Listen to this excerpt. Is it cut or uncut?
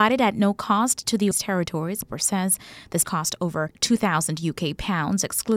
cut